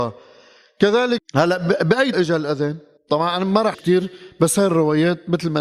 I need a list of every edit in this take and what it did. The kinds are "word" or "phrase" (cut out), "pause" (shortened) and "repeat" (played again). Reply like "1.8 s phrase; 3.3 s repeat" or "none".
1.2 s phrase; 2.1 s word; 3.0 s pause; 3.7 s word